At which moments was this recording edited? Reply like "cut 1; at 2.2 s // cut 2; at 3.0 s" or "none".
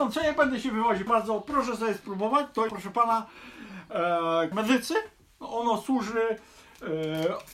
cut 1; at 1.1 s // cut 2; at 2.7 s // cut 3; at 4.5 s